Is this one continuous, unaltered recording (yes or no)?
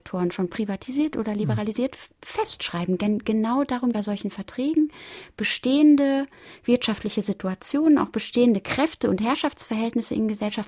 no